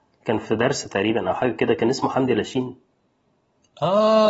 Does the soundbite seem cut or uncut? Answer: uncut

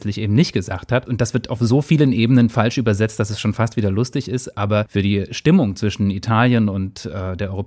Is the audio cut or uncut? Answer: uncut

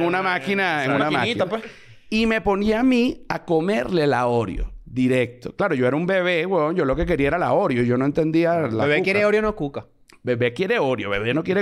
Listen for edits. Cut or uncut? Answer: uncut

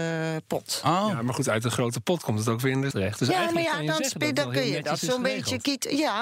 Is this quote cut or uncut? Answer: cut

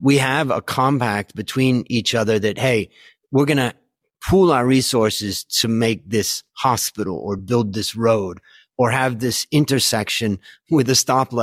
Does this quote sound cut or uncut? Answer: uncut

